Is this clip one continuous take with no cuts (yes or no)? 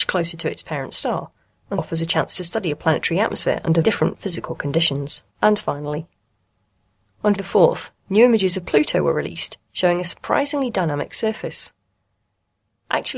no